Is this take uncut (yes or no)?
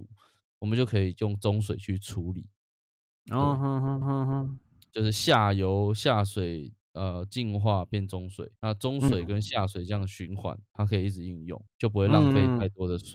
no